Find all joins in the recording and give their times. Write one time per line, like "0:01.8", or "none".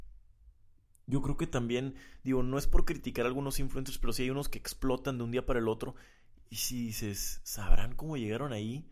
none